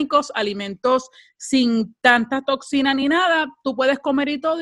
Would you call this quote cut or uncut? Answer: uncut